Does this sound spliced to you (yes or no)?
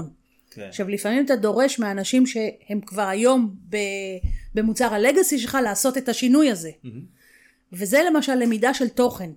no